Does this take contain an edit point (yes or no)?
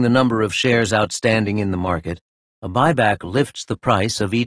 no